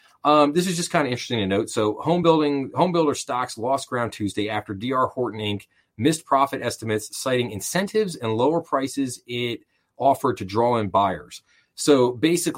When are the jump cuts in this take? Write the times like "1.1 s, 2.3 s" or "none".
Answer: none